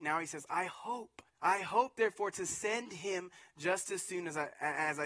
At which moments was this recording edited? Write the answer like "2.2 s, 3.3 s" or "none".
1.3 s